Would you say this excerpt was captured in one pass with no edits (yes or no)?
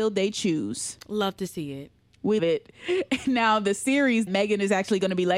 no